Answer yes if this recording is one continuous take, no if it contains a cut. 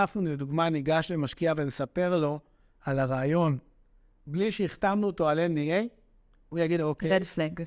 yes